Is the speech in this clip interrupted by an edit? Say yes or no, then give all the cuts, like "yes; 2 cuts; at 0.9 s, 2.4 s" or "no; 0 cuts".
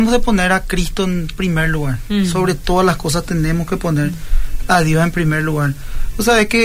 no; 0 cuts